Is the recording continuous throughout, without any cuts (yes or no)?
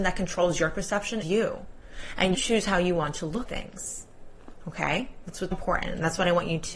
no